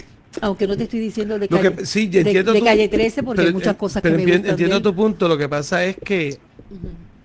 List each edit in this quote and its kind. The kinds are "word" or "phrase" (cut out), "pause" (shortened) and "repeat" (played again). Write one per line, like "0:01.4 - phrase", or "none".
none